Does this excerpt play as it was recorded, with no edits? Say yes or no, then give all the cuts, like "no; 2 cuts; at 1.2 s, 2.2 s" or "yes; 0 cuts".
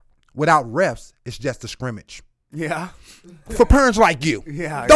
yes; 0 cuts